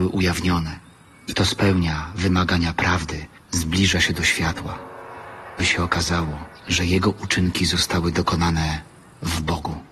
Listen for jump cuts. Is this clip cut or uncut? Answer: cut